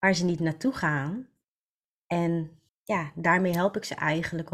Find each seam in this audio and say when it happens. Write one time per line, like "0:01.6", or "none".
0:02.7